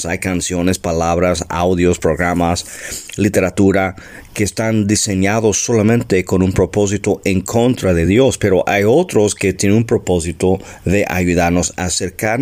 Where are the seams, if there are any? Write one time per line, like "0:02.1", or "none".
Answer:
none